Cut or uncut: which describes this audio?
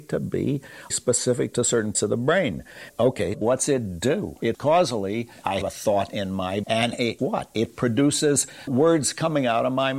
cut